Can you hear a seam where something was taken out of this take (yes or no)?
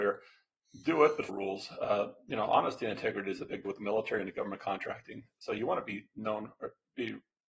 yes